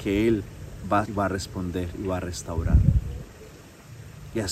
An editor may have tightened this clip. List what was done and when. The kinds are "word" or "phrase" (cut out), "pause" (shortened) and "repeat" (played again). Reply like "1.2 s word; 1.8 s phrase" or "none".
1.1 s word